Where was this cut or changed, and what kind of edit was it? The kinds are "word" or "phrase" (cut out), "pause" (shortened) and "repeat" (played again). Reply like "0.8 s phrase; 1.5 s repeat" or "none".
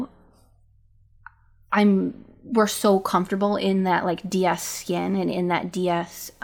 none